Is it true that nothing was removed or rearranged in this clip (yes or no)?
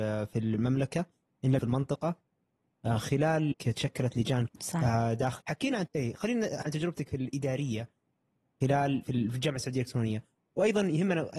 no